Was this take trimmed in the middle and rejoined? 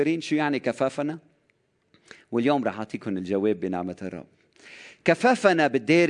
no; 0 cuts

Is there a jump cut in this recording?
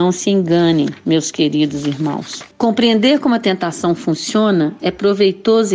no; 0 cuts

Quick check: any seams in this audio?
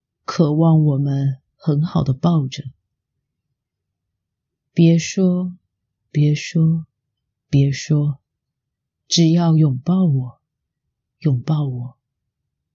no; 0 cuts

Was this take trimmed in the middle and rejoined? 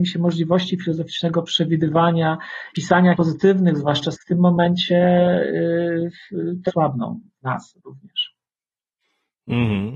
yes; 4 cuts; at 2.7 s, 3.1 s, 4.1 s, 6.7 s

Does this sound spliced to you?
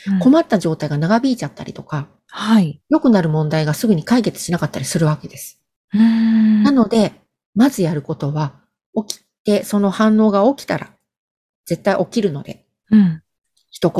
no; 0 cuts

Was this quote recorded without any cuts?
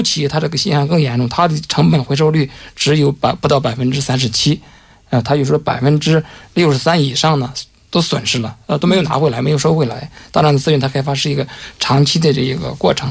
yes; 0 cuts

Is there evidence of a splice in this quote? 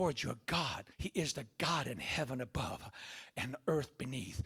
yes; 1 cut; at 0.9 s

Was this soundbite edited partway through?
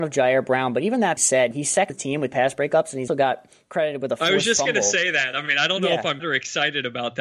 yes; 6 cuts; at 1.2 s, 1.5 s, 1.9 s, 2.3 s, 3.1 s, 6.2 s

